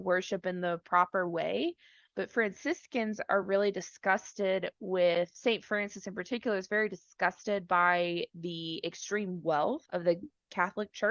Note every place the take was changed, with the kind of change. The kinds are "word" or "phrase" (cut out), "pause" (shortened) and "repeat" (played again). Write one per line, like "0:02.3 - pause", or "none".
none

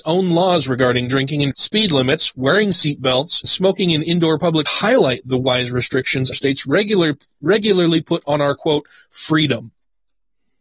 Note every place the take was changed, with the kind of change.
0:01.5 - word
0:03.4 - word
0:04.7 - word
0:06.3 - word

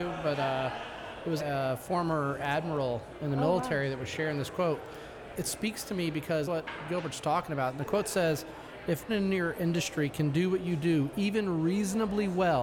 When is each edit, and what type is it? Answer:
0:01.4 - word
0:05.3 - word
0:06.4 - word
0:09.1 - word

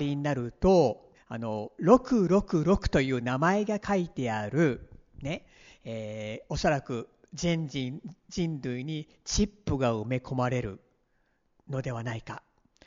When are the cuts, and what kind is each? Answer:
0:01.1 - word

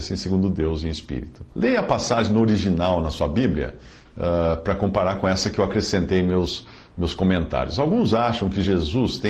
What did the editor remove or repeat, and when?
0:01.5 - pause

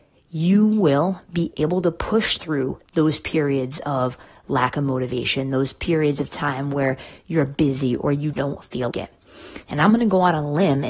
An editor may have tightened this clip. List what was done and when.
0:08.3 - word
0:08.9 - word

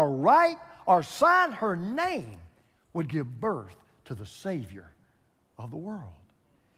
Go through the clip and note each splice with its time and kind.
none

